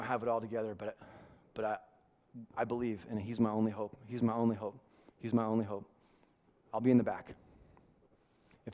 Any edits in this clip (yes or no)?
yes